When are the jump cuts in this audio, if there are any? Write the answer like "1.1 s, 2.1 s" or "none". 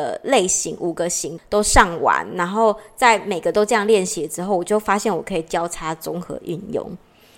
none

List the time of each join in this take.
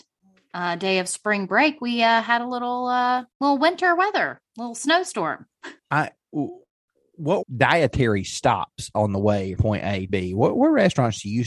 3.3 s, 5.8 s, 7.4 s, 9.6 s, 10.1 s

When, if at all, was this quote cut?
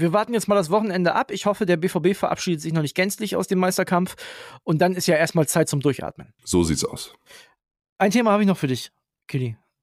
none

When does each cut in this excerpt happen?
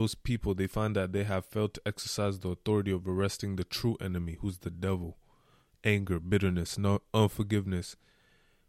none

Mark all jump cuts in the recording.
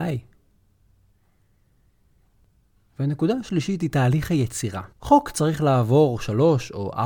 4.9 s

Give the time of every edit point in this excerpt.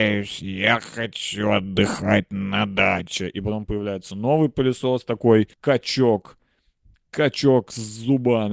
5.5 s

